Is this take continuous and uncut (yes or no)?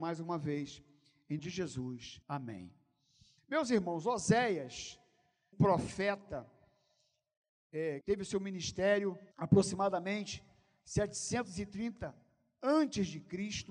no